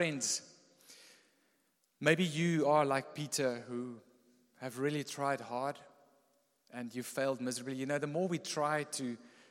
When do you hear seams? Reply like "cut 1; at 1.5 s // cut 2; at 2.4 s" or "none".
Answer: none